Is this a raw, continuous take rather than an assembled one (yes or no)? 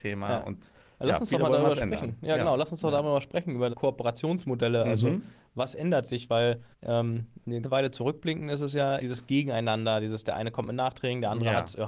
no